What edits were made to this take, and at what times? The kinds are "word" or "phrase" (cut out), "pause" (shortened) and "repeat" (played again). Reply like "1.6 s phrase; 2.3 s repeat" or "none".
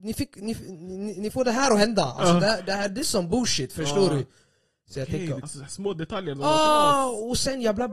5.4 s word